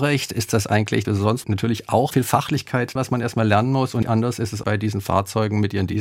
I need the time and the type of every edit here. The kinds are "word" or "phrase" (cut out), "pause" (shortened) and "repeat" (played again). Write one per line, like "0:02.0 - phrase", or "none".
0:01.0 - word
0:01.4 - word
0:02.1 - word
0:03.0 - word
0:04.0 - word
0:04.6 - word